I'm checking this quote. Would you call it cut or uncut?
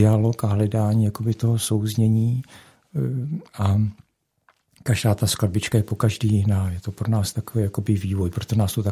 uncut